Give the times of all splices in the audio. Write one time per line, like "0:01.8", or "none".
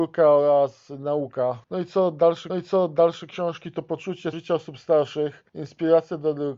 0:01.6
0:02.5
0:04.3
0:05.5